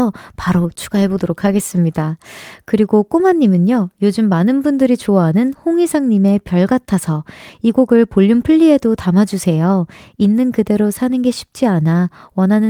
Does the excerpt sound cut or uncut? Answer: uncut